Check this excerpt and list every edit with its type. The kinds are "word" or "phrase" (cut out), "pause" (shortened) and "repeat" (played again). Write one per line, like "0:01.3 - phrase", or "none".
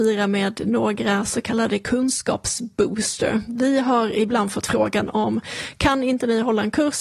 none